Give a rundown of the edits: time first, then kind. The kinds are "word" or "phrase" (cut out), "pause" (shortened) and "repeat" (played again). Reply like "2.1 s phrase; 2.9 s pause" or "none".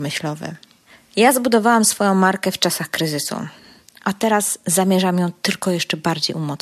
none